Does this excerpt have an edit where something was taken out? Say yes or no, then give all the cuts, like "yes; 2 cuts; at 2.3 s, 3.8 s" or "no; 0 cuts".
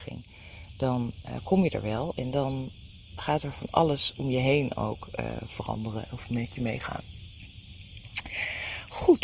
no; 0 cuts